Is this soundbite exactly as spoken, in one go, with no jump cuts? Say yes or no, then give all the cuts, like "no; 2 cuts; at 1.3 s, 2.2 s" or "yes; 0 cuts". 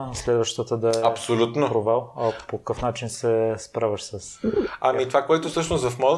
yes; 0 cuts